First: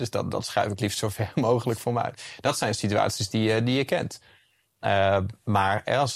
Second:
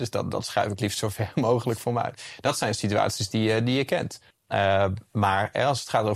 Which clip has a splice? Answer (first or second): second